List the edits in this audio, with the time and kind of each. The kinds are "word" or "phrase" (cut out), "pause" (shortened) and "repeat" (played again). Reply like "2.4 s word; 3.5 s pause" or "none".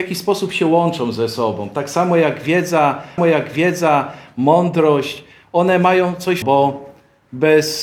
3.2 s repeat; 6.4 s word